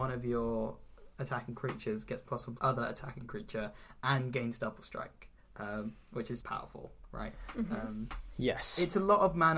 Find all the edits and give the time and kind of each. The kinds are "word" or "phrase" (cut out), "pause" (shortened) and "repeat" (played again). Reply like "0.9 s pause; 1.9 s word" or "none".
2.6 s phrase; 5.4 s pause; 6.4 s word